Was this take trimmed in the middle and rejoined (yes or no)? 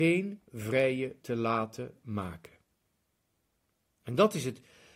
yes